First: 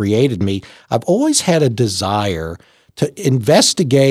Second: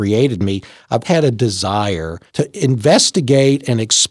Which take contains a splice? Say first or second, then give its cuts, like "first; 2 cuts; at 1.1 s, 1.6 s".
second; 2 cuts; at 1.0 s, 2.3 s